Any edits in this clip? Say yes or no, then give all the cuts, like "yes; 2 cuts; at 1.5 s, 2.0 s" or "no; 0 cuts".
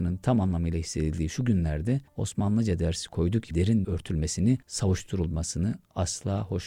yes; 4 cuts; at 2.1 s, 3.5 s, 3.8 s, 4.6 s